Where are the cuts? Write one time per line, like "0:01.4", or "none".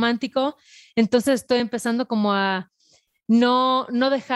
none